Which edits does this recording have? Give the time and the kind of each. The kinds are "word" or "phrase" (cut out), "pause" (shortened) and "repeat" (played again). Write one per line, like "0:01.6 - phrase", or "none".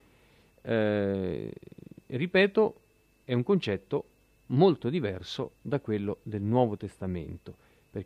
none

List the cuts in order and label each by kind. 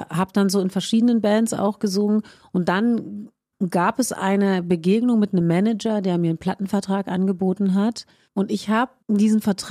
none

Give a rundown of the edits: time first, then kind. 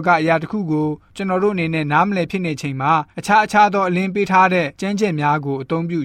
0:03.1 - pause
0:04.7 - pause

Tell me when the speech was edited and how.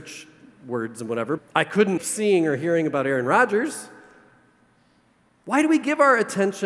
0:01.4 - word
0:02.0 - word

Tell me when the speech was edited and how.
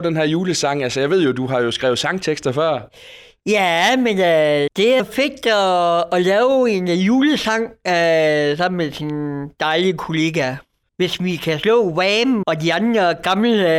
0:04.7 - word
0:05.0 - word
0:12.4 - word

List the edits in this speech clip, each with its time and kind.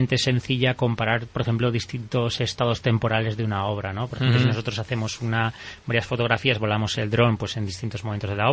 none

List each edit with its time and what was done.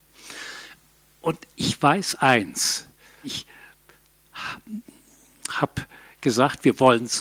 0:03.2 - word

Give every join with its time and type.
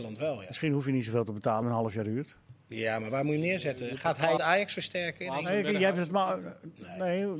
0:01.6 - phrase
0:04.4 - phrase

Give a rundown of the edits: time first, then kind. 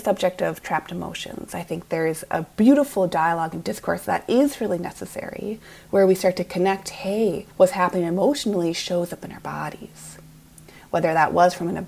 0:07.5 - pause

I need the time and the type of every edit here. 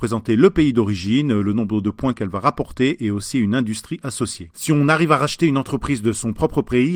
none

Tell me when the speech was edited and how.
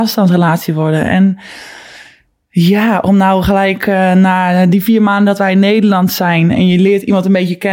none

